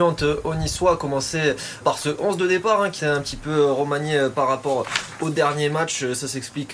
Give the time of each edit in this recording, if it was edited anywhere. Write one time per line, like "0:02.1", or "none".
0:01.8
0:03.0
0:05.2